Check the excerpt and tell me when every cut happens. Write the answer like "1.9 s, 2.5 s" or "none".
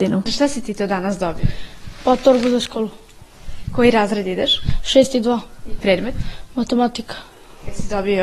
5.8 s